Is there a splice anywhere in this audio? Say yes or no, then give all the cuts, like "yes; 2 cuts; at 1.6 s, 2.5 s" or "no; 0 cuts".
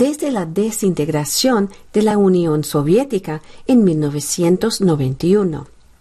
no; 0 cuts